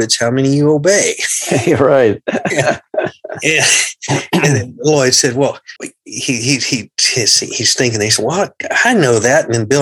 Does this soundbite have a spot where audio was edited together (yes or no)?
yes